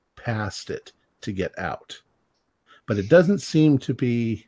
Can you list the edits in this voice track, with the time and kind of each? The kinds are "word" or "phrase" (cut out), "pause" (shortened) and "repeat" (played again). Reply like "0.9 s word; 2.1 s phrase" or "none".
none